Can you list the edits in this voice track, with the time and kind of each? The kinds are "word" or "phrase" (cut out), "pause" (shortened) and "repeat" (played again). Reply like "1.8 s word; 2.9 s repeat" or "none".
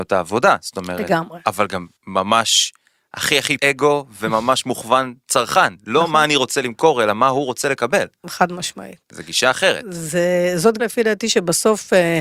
2.0 s pause; 3.6 s word; 10.8 s word

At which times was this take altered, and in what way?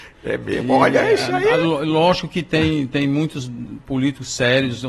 none

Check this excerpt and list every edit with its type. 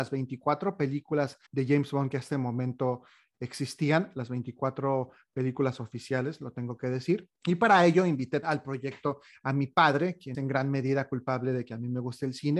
1.5 s pause; 2.3 s word; 7.4 s pause; 8.4 s word; 10.3 s word

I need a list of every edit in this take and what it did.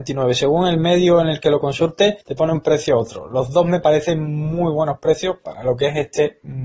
2.2 s pause

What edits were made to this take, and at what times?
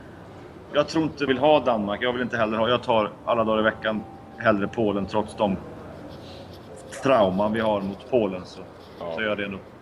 1.3 s word

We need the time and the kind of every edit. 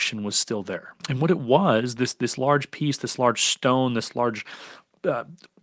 1.0 s pause

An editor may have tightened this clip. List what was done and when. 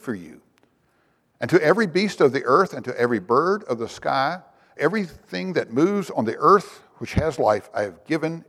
4.8 s word

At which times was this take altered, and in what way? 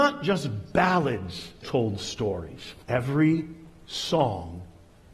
1.6 s word; 2.8 s pause

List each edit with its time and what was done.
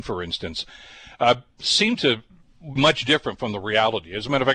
2.8 s word

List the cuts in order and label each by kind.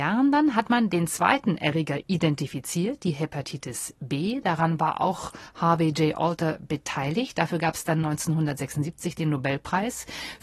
none

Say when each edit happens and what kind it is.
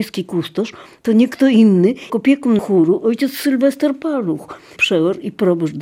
2.1 s word; 2.6 s word; 4.8 s word

